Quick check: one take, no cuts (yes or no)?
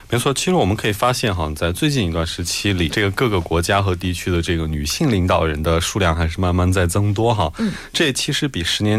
no